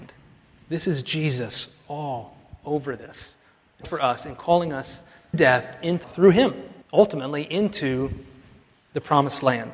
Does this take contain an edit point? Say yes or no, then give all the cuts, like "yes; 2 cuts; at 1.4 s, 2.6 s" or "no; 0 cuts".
yes; 4 cuts; at 3.8 s, 5.3 s, 6.0 s, 6.8 s